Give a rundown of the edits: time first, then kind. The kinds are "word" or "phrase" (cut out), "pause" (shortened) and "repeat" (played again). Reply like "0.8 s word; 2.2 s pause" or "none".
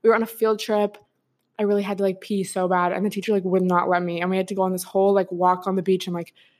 none